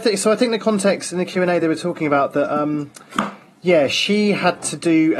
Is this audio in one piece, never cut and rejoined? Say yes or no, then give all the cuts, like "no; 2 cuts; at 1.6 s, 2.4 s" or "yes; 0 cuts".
yes; 0 cuts